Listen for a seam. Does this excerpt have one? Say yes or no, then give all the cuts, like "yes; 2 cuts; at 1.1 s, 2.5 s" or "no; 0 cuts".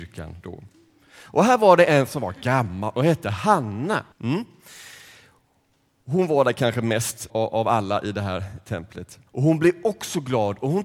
yes; 3 cuts; at 4.1 s, 7.3 s, 9.3 s